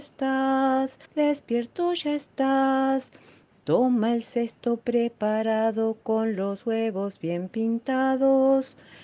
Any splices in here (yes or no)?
yes